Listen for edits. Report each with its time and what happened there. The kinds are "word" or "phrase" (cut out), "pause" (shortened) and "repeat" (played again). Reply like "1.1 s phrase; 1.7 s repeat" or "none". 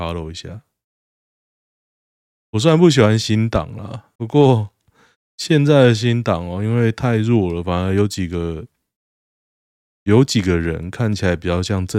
4.2 s pause